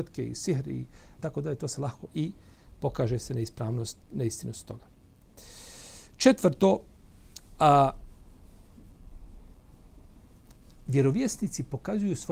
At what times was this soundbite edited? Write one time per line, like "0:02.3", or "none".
0:01.2
0:02.1

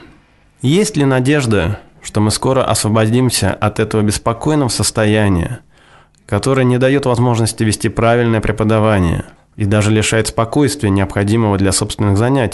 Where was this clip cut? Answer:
0:09.4

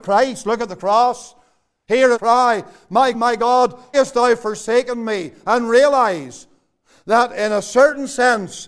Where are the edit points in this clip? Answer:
0:02.1
0:03.1
0:03.9

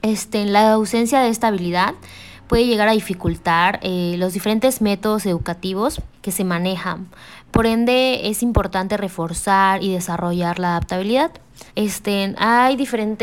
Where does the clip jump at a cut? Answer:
0:06.1
0:11.7

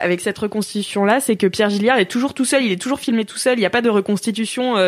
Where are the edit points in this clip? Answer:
none

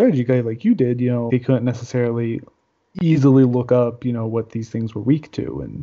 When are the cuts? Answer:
0:01.3

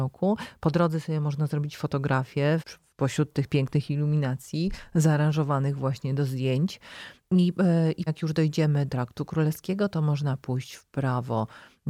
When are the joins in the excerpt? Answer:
0:02.6
0:08.1
0:08.9

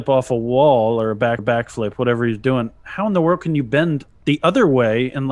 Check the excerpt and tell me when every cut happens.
0:01.4

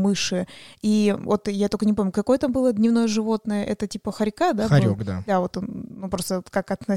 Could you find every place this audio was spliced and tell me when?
none

